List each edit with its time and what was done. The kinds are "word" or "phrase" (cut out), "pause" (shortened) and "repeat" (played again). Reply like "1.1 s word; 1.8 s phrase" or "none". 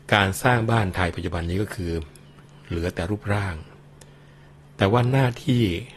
none